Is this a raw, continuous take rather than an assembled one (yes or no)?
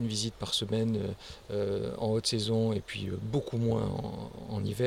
yes